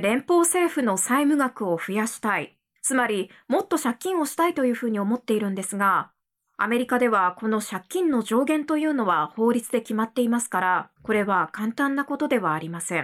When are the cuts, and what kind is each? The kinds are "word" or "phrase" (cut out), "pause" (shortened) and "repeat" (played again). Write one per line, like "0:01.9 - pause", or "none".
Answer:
0:10.9 - pause